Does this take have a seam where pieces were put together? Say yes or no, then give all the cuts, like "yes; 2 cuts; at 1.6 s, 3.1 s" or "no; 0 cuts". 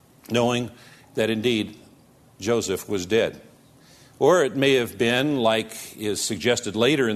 no; 0 cuts